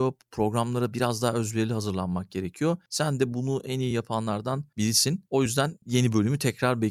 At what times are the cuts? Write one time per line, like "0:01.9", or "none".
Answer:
none

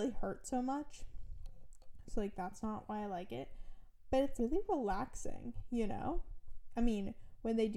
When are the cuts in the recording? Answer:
0:04.4

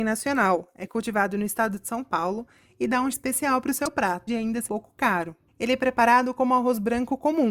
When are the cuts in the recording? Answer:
0:03.1
0:04.3
0:04.7

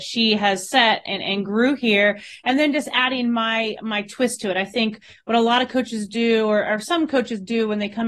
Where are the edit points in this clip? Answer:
none

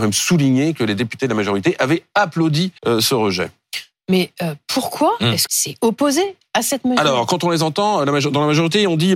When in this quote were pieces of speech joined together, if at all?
0:02.8
0:05.5

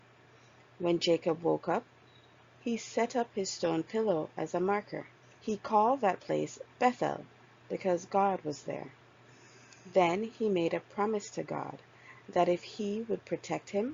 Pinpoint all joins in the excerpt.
0:05.2

